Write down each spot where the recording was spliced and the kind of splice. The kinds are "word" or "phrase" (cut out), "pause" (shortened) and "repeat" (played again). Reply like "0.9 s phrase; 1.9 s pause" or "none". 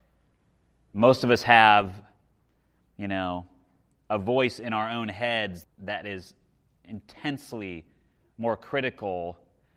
5.6 s word